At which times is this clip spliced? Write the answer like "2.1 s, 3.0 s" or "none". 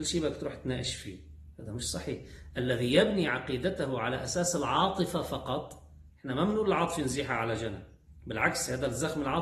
none